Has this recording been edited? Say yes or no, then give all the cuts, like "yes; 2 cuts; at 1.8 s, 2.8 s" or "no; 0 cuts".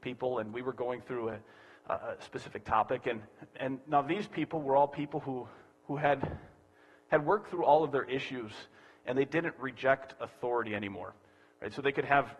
no; 0 cuts